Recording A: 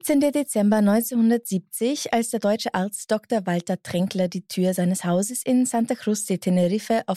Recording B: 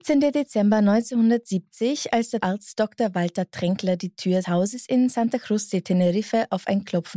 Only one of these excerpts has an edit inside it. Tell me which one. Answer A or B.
B